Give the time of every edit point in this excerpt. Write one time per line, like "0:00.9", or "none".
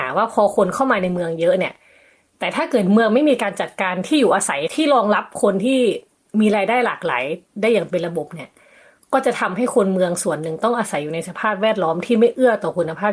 none